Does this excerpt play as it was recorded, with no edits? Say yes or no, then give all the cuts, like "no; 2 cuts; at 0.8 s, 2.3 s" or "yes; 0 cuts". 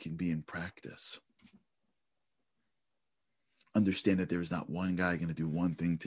yes; 0 cuts